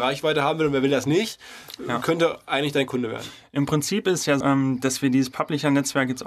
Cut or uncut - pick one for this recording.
cut